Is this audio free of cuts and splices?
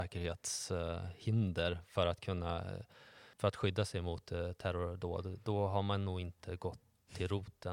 yes; 0 cuts

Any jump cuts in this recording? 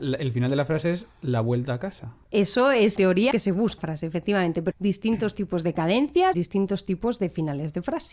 yes; 6 cuts; at 2.2 s, 3.0 s, 3.3 s, 3.8 s, 4.7 s, 6.3 s

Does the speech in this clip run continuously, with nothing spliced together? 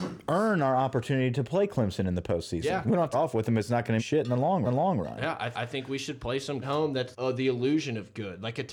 no; 6 cuts; at 3.1 s, 4.0 s, 4.6 s, 5.5 s, 6.6 s, 7.1 s

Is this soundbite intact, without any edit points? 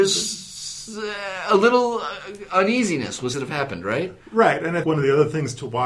no; 2 cuts; at 3.3 s, 4.8 s

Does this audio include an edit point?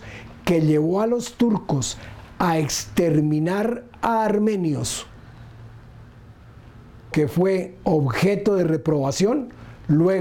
yes; 1 cut; at 7.1 s

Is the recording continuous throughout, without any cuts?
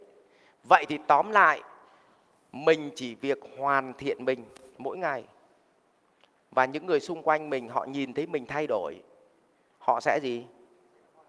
yes; 0 cuts

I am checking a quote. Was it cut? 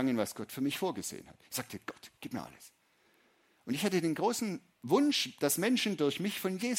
no; 0 cuts

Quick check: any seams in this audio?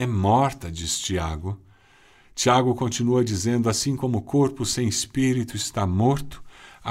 no; 0 cuts

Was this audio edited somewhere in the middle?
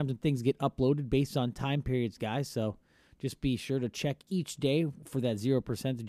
no; 0 cuts

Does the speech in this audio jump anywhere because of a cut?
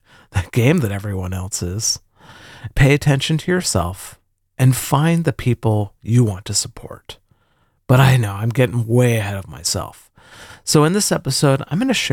no; 0 cuts

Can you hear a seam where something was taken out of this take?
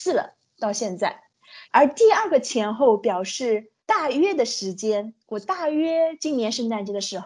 yes; 3 cuts; at 1.6 s, 3.8 s, 5.2 s

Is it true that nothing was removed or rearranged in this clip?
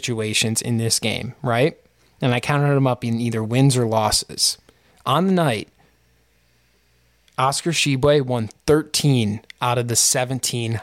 yes; 0 cuts

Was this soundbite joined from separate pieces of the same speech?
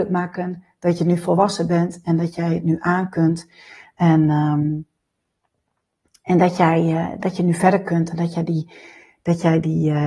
no; 0 cuts

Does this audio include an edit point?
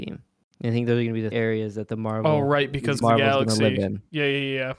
yes; 2 cuts; at 1.3 s, 3.0 s

